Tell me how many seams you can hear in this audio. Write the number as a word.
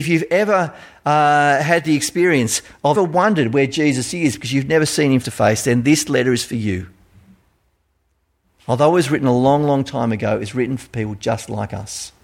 two